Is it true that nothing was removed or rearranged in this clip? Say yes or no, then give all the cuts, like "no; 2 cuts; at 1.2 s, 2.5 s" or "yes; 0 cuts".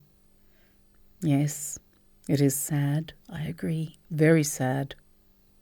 no; 2 cuts; at 3.2 s, 4.0 s